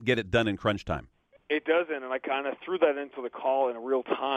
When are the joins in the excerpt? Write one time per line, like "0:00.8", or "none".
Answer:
none